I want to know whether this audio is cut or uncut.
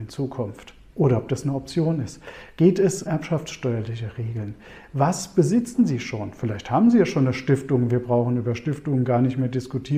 cut